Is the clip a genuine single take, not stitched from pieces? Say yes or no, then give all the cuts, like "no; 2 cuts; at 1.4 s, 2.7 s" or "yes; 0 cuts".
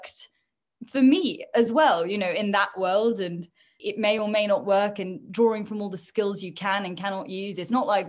yes; 0 cuts